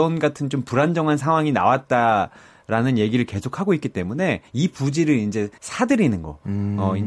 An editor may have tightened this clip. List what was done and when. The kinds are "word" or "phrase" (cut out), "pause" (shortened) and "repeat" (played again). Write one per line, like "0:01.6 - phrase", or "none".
0:04.5 - pause
0:05.6 - pause